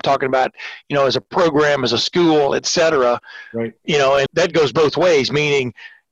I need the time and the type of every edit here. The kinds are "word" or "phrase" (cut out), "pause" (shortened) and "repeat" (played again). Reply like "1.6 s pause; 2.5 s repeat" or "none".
4.3 s word